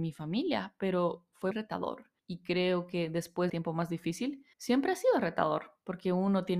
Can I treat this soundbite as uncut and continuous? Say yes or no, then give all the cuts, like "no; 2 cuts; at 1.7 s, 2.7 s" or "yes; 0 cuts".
no; 4 cuts; at 1.5 s, 2.2 s, 3.5 s, 4.5 s